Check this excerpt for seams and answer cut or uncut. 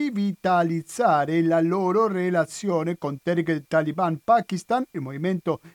uncut